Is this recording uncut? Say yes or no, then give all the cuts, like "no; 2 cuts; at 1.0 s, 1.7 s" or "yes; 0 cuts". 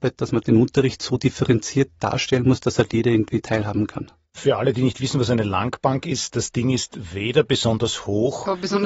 yes; 0 cuts